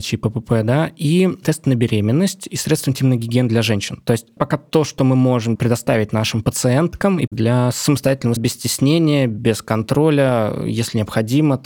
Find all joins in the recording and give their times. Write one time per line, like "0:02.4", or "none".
0:04.4
0:05.6
0:07.3
0:08.4